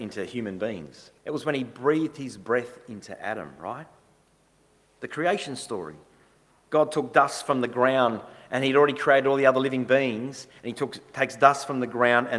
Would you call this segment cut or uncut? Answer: cut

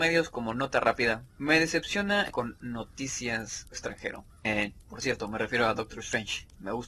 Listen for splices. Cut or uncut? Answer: cut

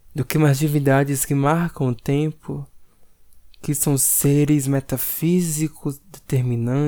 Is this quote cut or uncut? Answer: uncut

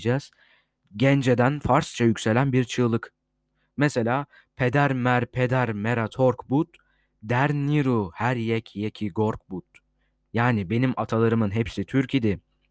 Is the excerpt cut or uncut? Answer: uncut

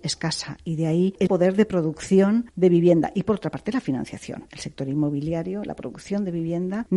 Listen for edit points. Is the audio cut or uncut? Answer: cut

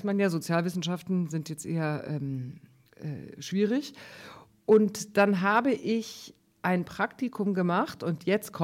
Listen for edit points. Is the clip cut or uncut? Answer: uncut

